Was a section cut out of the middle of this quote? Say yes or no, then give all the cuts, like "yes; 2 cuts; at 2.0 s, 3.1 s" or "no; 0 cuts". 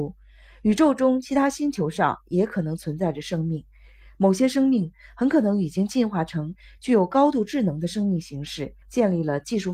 yes; 1 cut; at 8.8 s